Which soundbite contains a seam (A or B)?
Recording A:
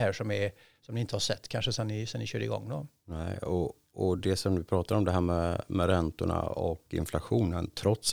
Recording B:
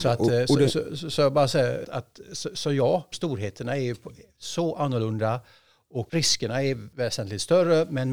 B